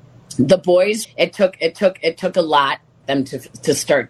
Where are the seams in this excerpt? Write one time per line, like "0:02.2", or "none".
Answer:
0:01.0
0:01.7
0:03.0